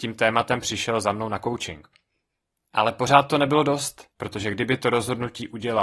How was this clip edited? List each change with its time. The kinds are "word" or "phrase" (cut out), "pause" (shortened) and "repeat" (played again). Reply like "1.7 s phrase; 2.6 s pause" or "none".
4.1 s pause